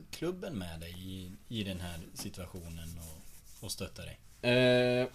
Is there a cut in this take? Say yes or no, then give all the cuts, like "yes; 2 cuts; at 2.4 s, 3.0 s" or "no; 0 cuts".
no; 0 cuts